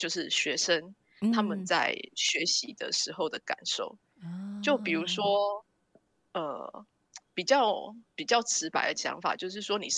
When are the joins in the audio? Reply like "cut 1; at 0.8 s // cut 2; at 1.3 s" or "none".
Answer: cut 1; at 5.8 s